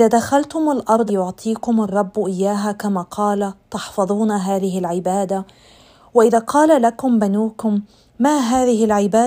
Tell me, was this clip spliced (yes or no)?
yes